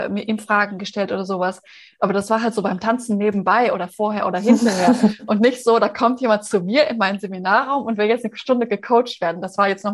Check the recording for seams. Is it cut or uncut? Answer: uncut